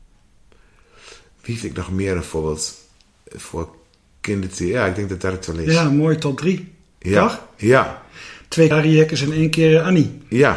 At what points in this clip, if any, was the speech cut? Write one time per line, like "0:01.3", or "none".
0:01.6
0:08.7